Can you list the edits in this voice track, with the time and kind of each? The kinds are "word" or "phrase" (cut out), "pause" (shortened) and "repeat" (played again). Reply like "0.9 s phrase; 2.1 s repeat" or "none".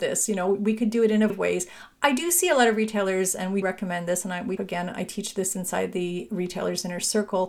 1.3 s word; 3.6 s word; 4.6 s word